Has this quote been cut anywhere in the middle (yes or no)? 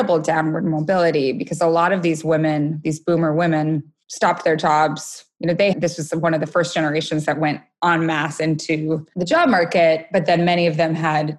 yes